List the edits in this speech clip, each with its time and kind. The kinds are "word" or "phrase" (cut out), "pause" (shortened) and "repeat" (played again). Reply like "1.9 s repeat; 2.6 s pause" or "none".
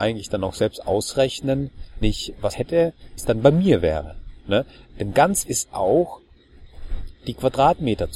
2.0 s word; 2.5 s word; 3.2 s word; 5.4 s word